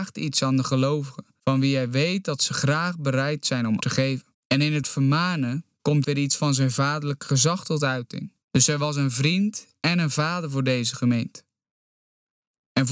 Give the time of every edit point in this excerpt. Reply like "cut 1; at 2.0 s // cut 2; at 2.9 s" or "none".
cut 1; at 1.4 s // cut 2; at 3.8 s // cut 3; at 4.3 s // cut 4; at 4.8 s // cut 5; at 6.0 s // cut 6; at 8.4 s